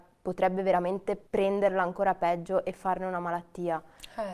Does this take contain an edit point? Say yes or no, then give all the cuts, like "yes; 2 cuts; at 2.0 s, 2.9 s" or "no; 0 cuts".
yes; 1 cut; at 1.3 s